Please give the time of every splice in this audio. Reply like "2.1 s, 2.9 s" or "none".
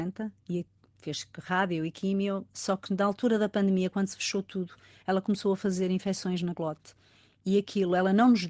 none